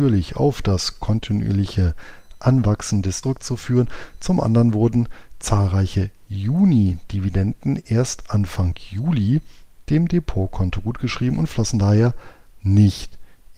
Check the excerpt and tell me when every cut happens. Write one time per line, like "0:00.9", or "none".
0:03.2